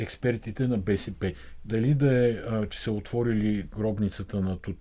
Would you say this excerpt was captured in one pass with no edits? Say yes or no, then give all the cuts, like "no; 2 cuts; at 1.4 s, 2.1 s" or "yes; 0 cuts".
yes; 0 cuts